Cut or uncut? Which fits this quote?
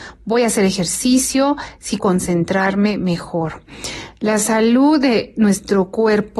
cut